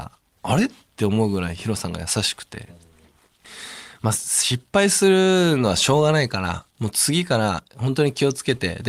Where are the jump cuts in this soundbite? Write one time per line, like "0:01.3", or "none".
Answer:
0:06.7